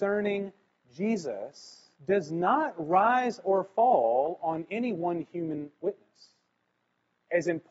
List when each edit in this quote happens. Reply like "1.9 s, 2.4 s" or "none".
1.9 s

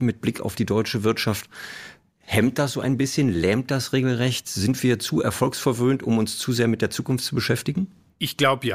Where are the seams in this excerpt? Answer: none

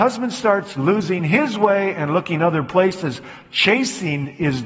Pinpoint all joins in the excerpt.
none

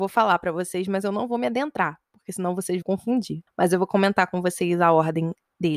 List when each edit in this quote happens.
2.8 s

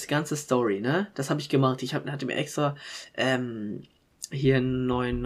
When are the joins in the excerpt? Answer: none

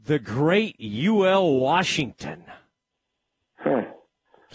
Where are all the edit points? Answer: none

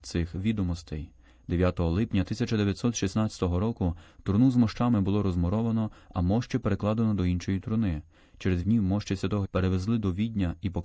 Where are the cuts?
8.6 s, 9.4 s

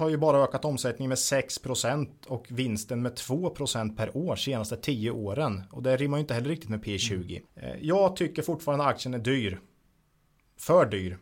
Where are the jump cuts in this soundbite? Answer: 7.5 s

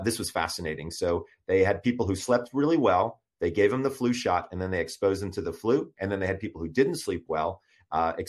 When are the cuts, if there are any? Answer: none

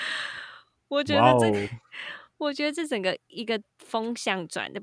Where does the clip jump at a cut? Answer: 3.7 s

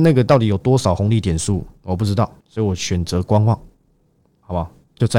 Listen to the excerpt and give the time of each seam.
2.4 s

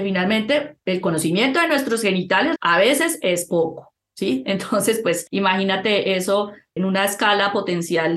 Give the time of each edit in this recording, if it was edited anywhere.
2.6 s, 6.8 s

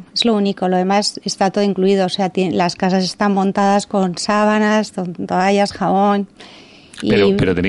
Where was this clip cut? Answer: none

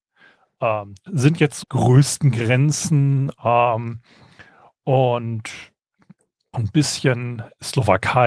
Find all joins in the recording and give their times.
1.1 s, 1.6 s, 6.5 s

